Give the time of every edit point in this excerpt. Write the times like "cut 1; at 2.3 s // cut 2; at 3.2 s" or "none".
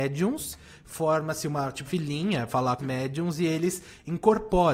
cut 1; at 1.9 s // cut 2; at 2.5 s // cut 3; at 2.8 s